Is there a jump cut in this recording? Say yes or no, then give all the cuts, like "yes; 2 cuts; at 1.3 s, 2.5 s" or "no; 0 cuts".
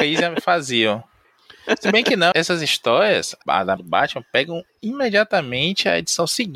yes; 3 cuts; at 2.3 s, 3.4 s, 3.8 s